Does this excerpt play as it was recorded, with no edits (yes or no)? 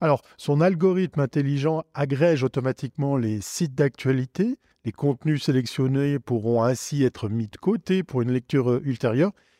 yes